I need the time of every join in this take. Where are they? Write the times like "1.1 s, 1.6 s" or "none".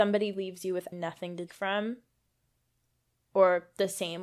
0.9 s, 1.5 s